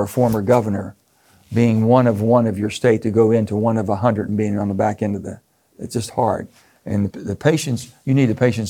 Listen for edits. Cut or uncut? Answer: cut